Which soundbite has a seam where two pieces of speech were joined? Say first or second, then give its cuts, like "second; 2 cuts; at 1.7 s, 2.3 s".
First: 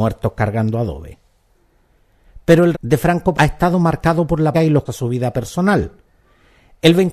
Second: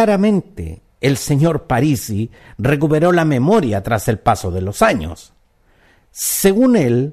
first; 4 cuts; at 2.7 s, 3.3 s, 4.5 s, 4.9 s